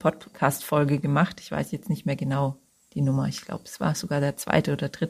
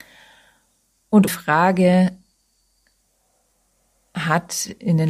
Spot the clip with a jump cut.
second; 1 cut; at 1.3 s

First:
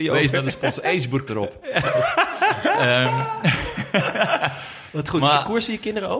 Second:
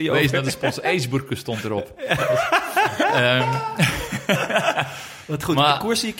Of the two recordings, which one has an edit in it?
first; 1 cut; at 1.3 s

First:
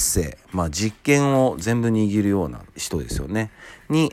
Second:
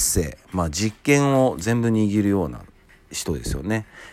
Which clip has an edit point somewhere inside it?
first; 1 cut; at 2.7 s

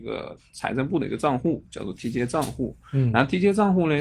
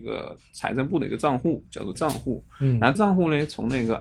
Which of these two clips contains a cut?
second; 2 cuts; at 1.9 s, 2.9 s

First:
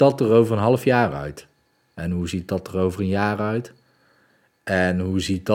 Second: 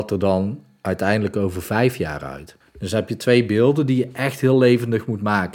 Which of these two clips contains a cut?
second; 1 cut; at 2.6 s

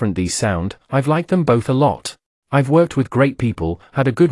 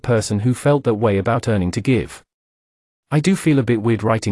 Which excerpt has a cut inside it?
first; 1 cut; at 2.3 s

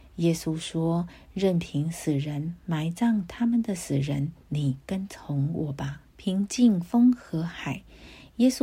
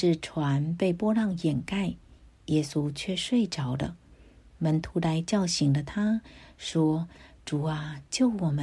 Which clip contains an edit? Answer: first; 2 cuts; at 4.4 s, 6.1 s

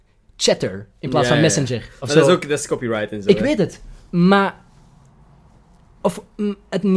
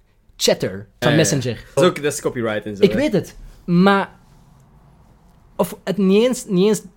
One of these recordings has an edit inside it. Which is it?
second; 3 cuts; at 1.0 s, 1.8 s, 5.8 s

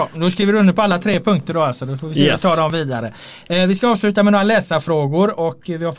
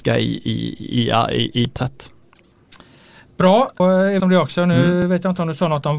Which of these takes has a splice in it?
second; 3 cuts; at 1.8 s, 3.8 s, 4.2 s

